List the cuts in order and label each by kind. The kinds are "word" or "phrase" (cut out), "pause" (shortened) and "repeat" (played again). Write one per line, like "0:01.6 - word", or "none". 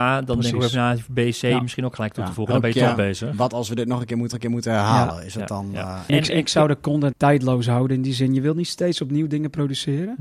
0:04.3 - repeat
0:06.1 - word
0:07.1 - phrase